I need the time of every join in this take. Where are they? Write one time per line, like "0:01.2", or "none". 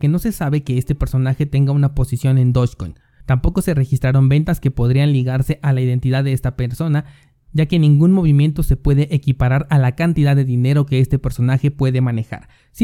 none